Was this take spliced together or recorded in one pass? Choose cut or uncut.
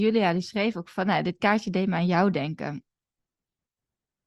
uncut